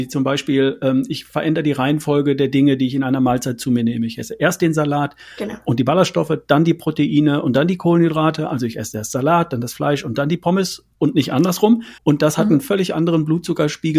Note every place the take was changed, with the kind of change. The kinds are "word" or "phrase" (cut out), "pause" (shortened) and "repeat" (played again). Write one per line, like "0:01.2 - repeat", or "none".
0:10.9 - pause
0:12.0 - pause